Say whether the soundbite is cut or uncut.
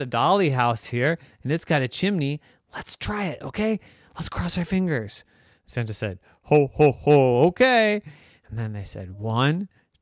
uncut